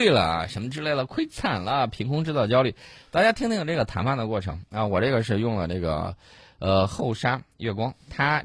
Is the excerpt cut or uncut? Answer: uncut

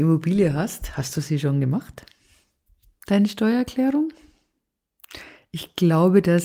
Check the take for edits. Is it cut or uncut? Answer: uncut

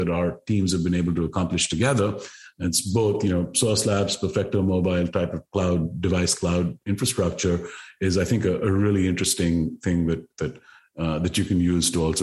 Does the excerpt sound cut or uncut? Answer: uncut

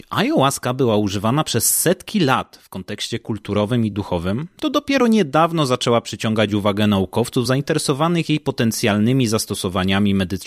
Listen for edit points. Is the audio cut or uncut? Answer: uncut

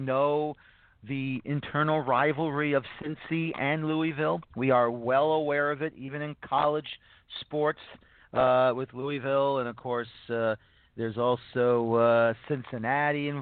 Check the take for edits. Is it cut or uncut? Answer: uncut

